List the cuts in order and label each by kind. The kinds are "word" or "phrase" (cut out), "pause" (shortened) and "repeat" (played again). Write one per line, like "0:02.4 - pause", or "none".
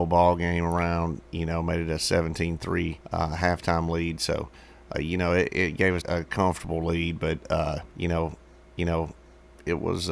0:03.0 - pause
0:04.9 - word
0:05.5 - word
0:06.0 - word
0:07.9 - pause
0:08.8 - repeat